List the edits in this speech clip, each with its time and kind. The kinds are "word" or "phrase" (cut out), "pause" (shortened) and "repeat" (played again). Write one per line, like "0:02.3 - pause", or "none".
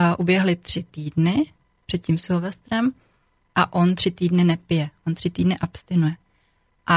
none